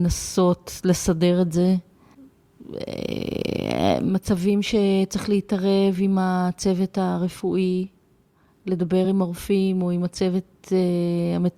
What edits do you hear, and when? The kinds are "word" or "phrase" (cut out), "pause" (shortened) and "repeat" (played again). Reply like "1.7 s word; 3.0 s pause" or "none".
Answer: none